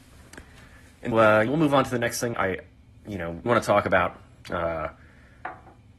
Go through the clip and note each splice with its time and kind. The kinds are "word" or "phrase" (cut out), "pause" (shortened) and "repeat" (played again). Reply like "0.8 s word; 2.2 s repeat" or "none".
1.1 s word; 1.5 s word; 2.3 s word; 3.5 s word